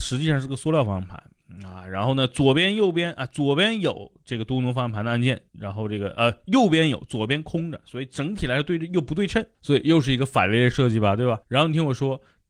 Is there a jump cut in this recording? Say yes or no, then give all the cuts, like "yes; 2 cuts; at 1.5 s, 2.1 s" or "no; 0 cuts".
yes; 3 cuts; at 5.5 s, 9.5 s, 11.4 s